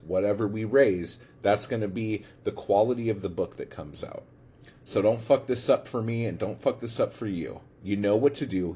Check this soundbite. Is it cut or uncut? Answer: cut